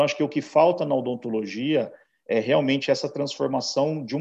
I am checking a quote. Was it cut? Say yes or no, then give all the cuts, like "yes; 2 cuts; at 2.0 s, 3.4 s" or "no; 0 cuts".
no; 0 cuts